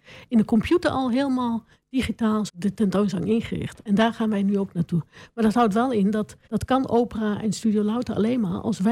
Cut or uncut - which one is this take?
cut